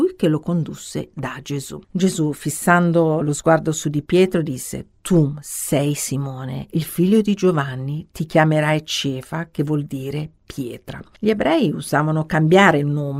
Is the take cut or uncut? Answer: cut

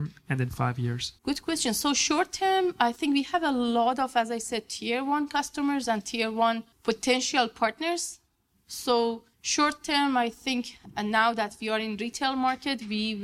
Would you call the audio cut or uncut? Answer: cut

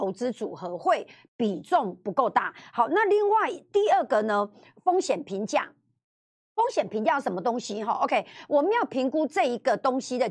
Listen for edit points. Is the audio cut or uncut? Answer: uncut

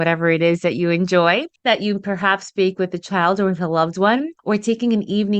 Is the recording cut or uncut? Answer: cut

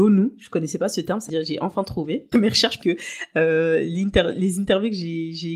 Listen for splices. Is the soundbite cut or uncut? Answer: cut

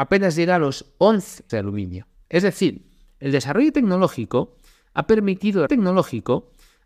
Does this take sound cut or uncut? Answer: cut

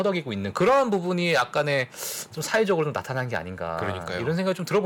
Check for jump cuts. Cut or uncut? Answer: uncut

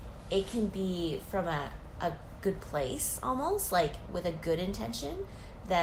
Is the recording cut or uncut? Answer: uncut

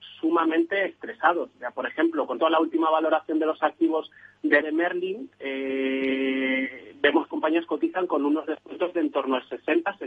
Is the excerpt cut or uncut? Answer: cut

